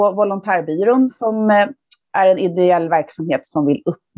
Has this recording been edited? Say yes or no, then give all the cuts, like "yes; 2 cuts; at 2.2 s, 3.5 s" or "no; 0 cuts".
no; 0 cuts